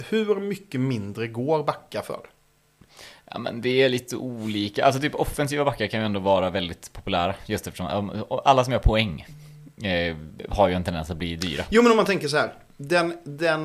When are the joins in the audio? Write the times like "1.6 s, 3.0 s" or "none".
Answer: none